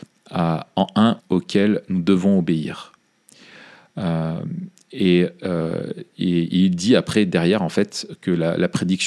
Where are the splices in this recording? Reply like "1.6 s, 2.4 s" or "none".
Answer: 1.2 s